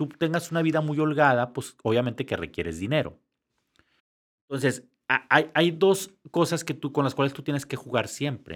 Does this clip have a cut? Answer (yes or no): no